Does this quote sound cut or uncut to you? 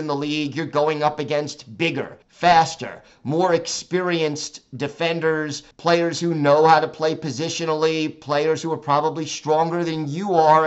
cut